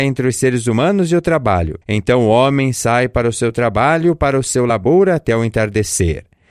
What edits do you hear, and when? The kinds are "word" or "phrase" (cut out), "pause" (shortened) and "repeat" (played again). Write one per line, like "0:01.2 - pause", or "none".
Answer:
0:01.8 - pause